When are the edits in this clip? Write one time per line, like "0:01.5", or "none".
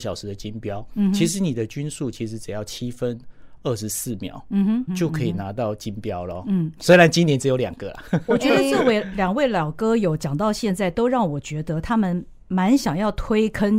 0:04.9